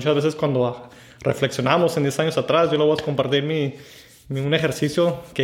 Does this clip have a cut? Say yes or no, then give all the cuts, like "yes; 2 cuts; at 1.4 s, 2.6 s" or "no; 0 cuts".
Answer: no; 0 cuts